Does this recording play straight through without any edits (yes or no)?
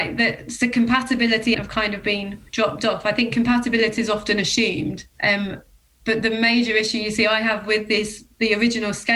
no